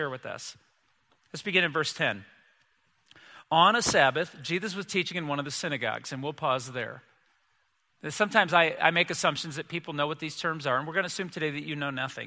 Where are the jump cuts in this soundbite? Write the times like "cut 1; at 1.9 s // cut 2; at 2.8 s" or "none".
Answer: none